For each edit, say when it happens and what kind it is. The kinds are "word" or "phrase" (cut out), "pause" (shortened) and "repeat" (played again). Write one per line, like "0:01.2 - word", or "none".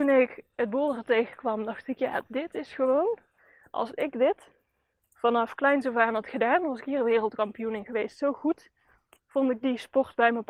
none

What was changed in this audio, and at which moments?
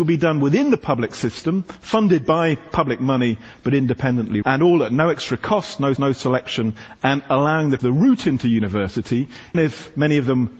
0:04.4 - word
0:06.0 - repeat
0:07.8 - word
0:09.5 - word

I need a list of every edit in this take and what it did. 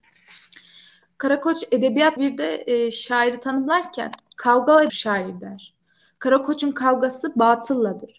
0:02.2 - word
0:04.9 - phrase

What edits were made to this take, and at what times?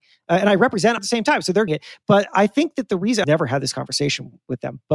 0:01.0 - word
0:01.7 - word
0:03.2 - word

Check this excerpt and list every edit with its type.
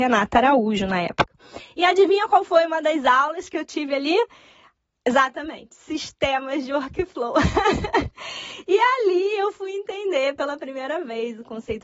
none

